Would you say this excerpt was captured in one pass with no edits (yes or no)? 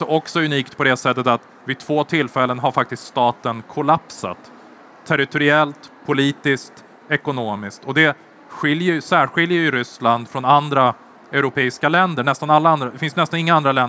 yes